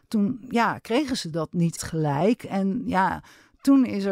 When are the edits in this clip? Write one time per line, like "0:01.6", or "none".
0:01.8